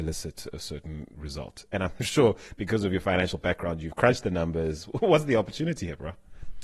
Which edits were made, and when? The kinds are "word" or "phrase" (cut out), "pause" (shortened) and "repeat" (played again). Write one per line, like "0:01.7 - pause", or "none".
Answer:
none

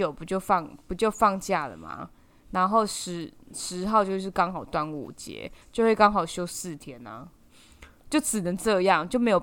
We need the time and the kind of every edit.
none

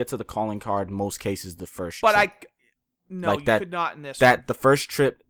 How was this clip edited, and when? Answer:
none

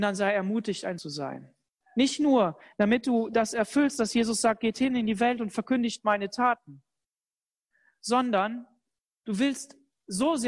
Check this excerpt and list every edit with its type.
0:01.0 - word

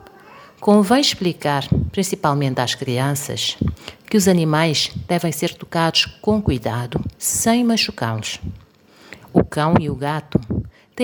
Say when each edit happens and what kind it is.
0:07.2 - pause

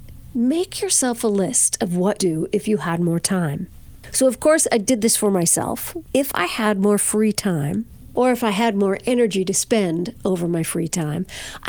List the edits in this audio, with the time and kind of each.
0:02.2 - phrase

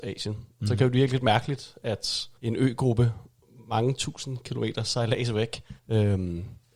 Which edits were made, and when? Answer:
0:02.4 - pause
0:05.8 - pause

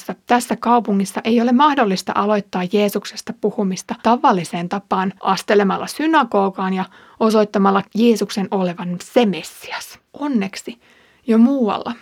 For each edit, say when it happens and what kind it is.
0:04.0 - pause
0:05.2 - pause
0:07.8 - word
0:10.1 - pause

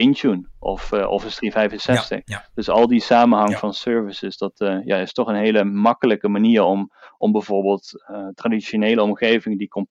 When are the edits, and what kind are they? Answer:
none

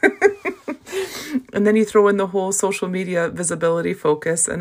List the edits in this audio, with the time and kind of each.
0:01.5 - word

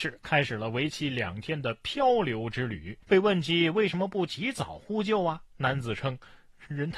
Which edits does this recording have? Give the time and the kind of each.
0:03.0 - pause

